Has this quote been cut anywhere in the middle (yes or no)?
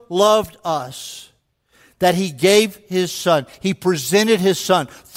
no